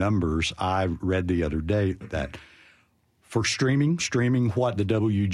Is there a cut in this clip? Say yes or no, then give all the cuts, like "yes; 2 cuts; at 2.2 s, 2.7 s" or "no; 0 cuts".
yes; 1 cut; at 4.0 s